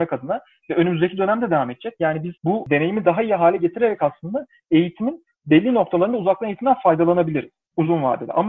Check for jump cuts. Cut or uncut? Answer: cut